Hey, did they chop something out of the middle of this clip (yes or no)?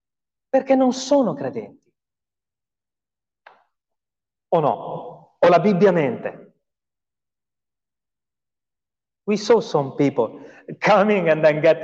no